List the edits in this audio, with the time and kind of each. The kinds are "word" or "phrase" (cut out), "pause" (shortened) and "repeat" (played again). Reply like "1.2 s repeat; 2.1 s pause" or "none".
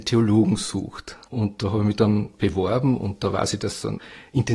1.2 s pause